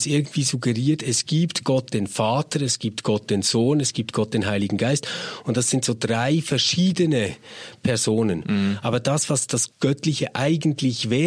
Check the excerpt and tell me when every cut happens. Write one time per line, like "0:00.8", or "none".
0:09.7